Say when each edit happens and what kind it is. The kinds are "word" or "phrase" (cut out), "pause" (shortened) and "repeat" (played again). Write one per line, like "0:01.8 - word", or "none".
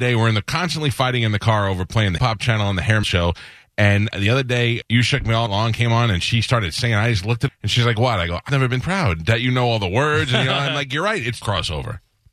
0:02.2 - word
0:03.0 - word
0:04.1 - word
0:04.8 - word
0:05.5 - word
0:07.5 - word
0:08.5 - word
0:08.8 - word
0:11.4 - word